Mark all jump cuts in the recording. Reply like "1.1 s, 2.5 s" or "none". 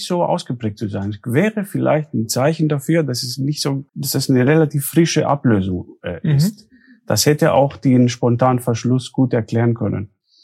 3.9 s